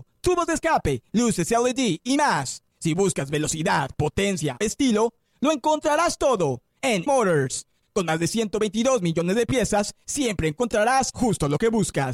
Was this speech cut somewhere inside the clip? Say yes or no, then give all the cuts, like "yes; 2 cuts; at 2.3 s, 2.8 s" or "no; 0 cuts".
yes; 2 cuts; at 4.6 s, 7.1 s